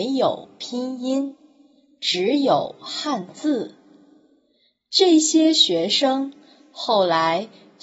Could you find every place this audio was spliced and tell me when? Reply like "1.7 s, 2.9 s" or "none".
none